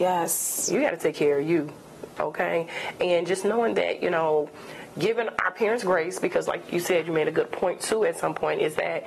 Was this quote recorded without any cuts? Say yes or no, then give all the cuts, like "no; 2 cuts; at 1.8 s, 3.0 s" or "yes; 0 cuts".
yes; 0 cuts